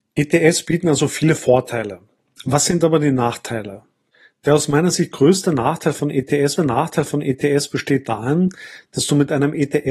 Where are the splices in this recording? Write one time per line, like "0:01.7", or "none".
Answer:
0:06.6